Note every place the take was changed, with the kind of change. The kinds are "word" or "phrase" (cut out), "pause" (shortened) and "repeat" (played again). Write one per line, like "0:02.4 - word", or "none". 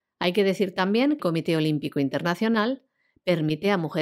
0:01.2 - word